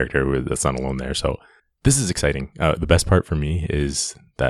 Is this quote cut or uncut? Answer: uncut